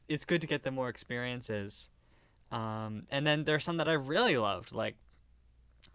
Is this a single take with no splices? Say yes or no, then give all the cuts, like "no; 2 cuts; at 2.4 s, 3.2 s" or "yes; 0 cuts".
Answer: yes; 0 cuts